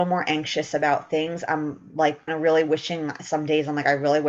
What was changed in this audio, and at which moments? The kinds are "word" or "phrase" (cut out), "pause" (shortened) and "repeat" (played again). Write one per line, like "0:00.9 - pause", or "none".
0:02.3 - word